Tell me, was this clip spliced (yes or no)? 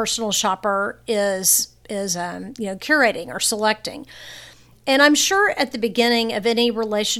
no